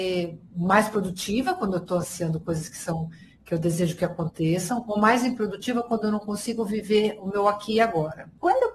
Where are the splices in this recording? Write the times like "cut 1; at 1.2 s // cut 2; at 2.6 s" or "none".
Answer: none